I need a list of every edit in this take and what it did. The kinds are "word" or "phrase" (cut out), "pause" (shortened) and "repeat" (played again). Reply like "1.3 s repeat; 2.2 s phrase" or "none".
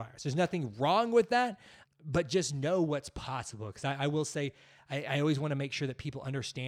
1.8 s word